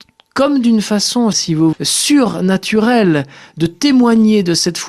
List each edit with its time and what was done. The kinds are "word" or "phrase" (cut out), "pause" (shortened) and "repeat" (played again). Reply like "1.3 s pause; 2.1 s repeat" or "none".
1.3 s word; 1.7 s word